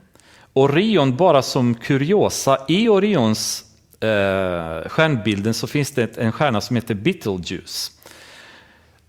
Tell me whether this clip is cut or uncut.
uncut